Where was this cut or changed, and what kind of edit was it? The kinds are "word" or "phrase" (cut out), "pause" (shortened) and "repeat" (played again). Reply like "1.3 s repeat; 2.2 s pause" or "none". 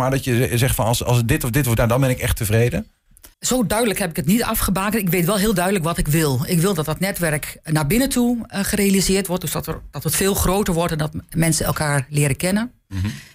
1.8 s phrase; 3.3 s pause

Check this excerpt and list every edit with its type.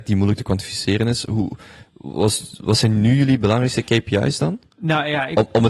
4.7 s pause

